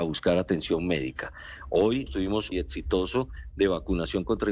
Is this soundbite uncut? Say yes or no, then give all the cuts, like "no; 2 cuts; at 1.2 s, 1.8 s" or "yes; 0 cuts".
no; 2 cuts; at 2.1 s, 2.5 s